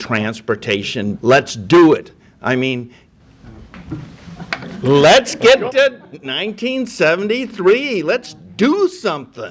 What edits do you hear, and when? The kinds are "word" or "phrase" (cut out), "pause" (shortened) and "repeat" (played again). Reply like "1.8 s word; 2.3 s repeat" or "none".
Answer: 1.1 s word; 5.7 s word